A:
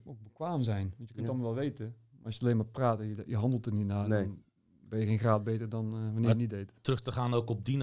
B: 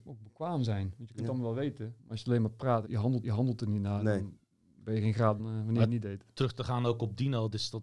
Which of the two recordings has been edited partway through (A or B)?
B